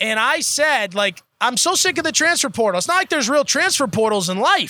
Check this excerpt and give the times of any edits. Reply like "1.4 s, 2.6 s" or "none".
none